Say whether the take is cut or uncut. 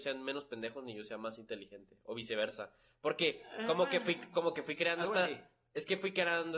uncut